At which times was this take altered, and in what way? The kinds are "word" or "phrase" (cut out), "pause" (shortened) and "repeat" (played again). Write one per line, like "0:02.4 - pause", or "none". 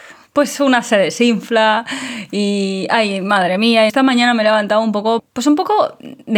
0:03.9 - word
0:05.2 - word